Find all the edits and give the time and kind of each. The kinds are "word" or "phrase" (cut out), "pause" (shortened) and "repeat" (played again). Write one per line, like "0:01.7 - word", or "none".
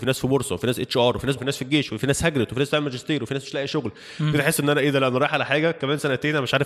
0:01.4 - word